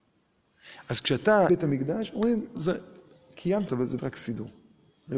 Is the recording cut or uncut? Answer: cut